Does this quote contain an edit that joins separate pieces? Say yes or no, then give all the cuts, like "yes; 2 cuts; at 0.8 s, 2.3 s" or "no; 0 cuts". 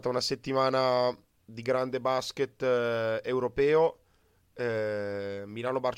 no; 0 cuts